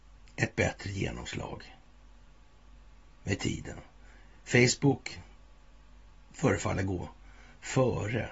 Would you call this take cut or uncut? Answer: uncut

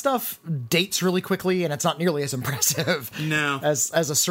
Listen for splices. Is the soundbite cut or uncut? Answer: uncut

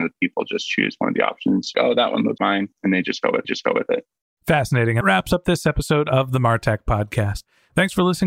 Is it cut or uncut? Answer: cut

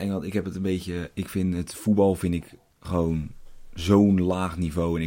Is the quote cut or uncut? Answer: uncut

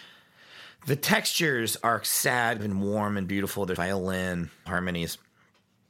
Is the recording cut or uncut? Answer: cut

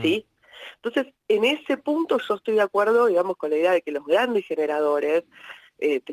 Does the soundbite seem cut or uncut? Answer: uncut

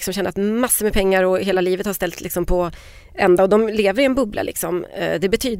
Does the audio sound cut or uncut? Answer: uncut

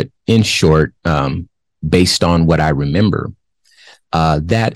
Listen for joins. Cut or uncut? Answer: uncut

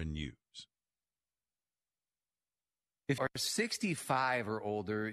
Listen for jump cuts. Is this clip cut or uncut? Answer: cut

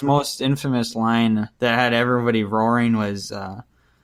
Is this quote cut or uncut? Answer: cut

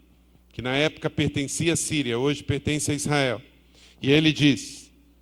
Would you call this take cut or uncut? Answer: uncut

